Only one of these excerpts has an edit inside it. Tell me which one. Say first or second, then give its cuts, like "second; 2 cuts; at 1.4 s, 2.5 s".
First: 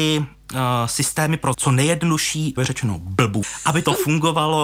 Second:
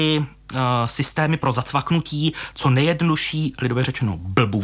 first; 3 cuts; at 1.5 s, 2.6 s, 3.4 s